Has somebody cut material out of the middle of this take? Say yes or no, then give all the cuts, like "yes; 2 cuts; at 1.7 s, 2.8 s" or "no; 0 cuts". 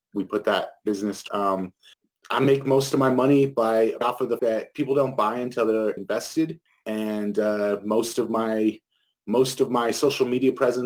yes; 6 cuts; at 1.3 s, 1.9 s, 4.0 s, 4.4 s, 6.0 s, 6.7 s